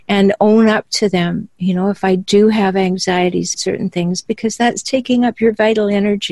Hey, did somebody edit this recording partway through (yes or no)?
yes